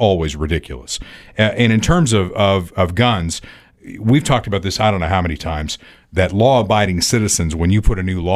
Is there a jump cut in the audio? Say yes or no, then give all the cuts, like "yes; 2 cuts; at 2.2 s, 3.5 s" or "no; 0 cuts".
no; 0 cuts